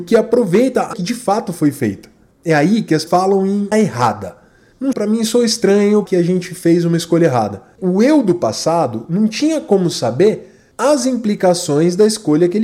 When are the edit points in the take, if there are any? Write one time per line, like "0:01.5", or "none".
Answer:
0:00.9
0:03.1
0:03.7
0:04.9
0:06.1
0:07.8

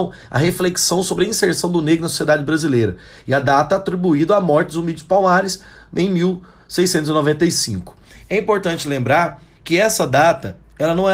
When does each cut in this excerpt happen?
none

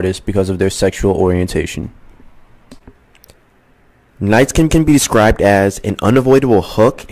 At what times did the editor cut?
0:04.7

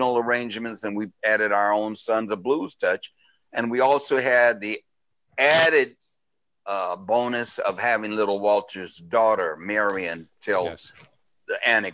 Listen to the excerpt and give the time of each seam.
none

